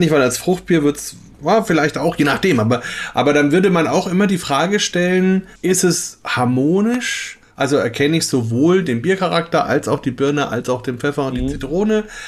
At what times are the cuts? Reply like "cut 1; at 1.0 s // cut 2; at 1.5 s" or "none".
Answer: cut 1; at 5.6 s